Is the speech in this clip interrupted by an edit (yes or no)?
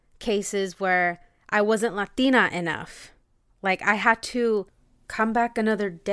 no